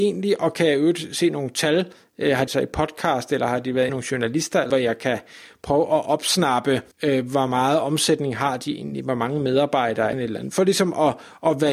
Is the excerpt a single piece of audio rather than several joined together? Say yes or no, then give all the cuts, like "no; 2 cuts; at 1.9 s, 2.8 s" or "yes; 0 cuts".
no; 5 cuts; at 2.5 s, 3.9 s, 4.7 s, 6.9 s, 10.1 s